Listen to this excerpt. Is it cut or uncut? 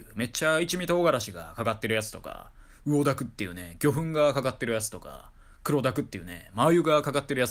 uncut